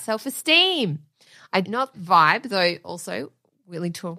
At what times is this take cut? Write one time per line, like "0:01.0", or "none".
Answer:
0:01.6
0:01.9